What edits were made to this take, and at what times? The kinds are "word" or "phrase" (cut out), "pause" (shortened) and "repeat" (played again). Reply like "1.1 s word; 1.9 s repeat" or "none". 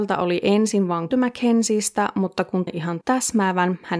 1.1 s word; 2.7 s word; 3.0 s word